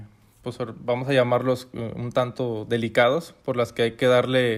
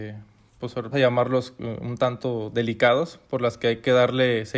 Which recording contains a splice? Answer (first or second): second